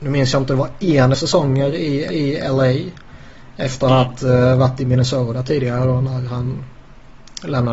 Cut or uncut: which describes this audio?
cut